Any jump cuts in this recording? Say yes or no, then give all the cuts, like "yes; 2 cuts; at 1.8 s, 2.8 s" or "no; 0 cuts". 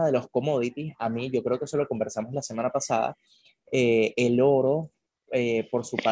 no; 0 cuts